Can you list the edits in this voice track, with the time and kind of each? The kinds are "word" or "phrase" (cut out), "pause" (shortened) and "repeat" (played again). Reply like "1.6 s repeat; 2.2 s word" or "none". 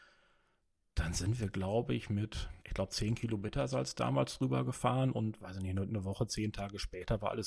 2.6 s pause

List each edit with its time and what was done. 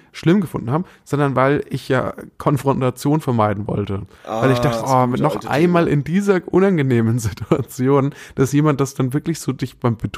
4.8 s word

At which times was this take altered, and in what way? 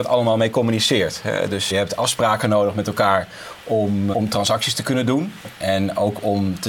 1.7 s word; 4.1 s word

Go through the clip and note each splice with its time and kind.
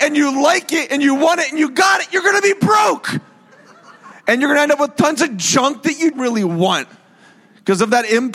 6.1 s word

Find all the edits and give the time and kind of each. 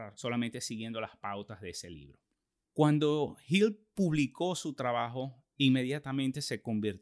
none

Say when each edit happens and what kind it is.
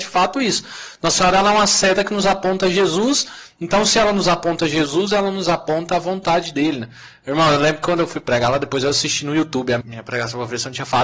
9.8 s word

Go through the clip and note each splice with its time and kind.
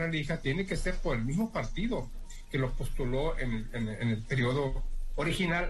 none

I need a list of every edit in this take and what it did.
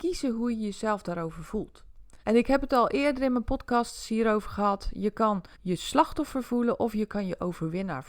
2.2 s pause; 5.5 s pause

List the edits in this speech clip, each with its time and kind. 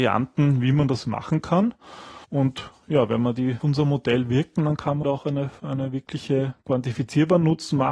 2.2 s pause; 3.6 s phrase; 5.0 s word; 5.6 s word

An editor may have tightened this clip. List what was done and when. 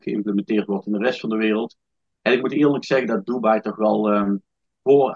none

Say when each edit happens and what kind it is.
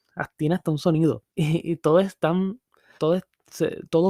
1.3 s pause; 3.0 s word

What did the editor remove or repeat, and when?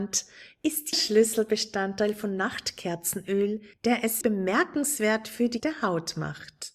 0.9 s word; 4.2 s word; 5.6 s word

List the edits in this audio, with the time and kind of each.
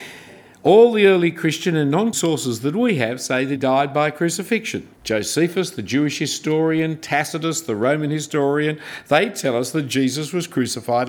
2.1 s word; 3.6 s word; 4.9 s pause

